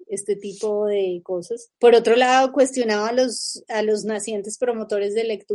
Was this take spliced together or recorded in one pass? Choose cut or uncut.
uncut